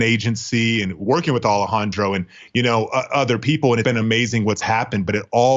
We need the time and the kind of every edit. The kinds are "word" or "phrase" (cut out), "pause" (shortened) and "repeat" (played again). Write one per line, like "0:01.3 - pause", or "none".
0:03.8 - word